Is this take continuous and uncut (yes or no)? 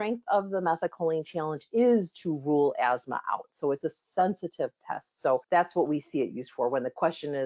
no